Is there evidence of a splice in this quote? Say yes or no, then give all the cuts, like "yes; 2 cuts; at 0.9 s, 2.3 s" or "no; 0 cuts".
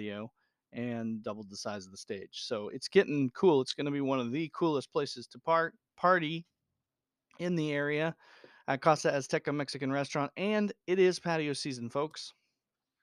no; 0 cuts